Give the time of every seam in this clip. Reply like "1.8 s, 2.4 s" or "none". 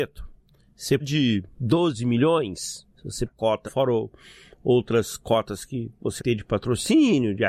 1.0 s, 1.5 s, 2.9 s, 3.3 s, 3.6 s, 6.2 s

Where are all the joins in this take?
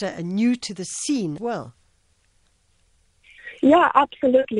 1.4 s

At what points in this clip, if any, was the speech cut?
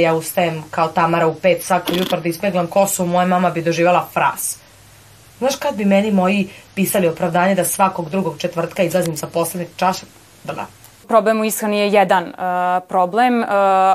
none

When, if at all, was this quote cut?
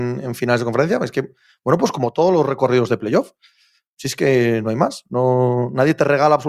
none

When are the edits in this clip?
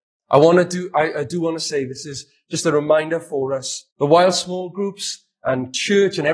3.9 s

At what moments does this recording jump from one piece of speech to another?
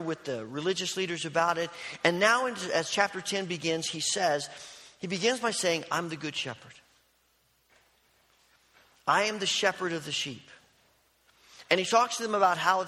none

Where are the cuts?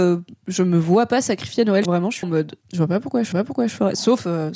1.8 s, 2.2 s, 2.6 s, 3.3 s

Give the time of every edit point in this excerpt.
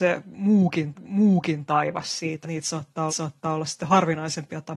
0.9 s, 2.4 s, 3.1 s

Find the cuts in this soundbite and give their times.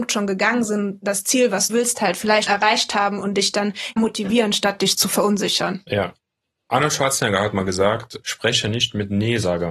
1.7 s, 2.5 s, 4.0 s, 8.2 s

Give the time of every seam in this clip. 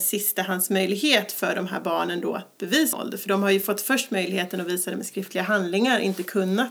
2.9 s

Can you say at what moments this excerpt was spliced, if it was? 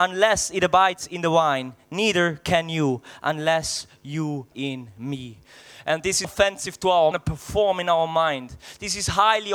4.5 s, 6.2 s, 7.1 s

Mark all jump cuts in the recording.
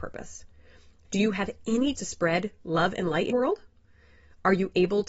2.0 s, 3.3 s

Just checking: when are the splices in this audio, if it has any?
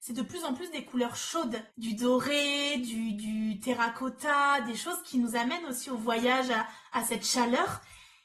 1.7 s

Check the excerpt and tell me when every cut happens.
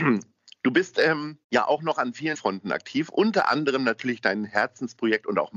1.4 s, 2.3 s

